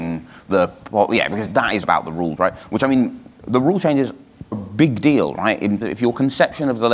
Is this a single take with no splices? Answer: no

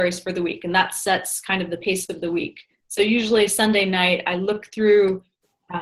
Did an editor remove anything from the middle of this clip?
no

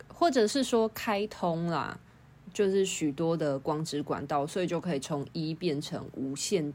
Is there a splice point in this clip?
no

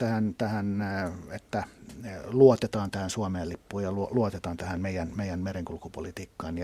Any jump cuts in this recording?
no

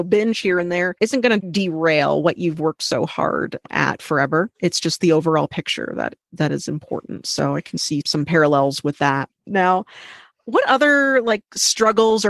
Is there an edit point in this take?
yes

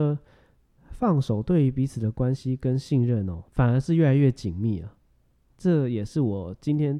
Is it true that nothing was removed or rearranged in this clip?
no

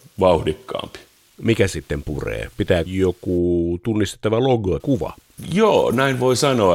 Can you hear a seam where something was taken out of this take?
yes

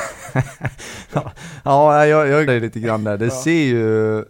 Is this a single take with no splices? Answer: no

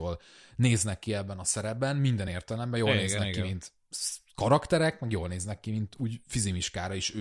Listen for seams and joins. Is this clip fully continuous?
yes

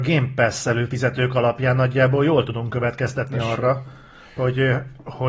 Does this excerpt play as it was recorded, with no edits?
yes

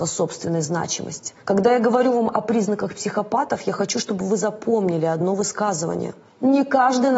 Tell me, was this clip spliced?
yes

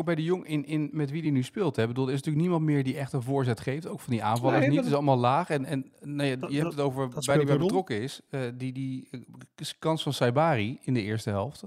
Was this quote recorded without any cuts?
yes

